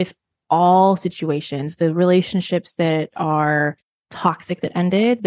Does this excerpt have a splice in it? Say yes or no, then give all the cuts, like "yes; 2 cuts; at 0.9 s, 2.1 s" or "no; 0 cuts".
no; 0 cuts